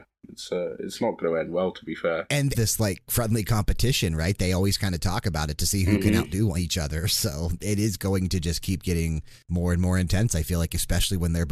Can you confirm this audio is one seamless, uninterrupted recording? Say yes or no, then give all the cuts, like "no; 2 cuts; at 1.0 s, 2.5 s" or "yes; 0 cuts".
no; 2 cuts; at 2.5 s, 9.4 s